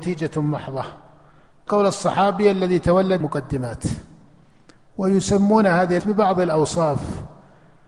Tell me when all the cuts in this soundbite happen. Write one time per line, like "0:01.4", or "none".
0:01.7
0:03.2
0:06.0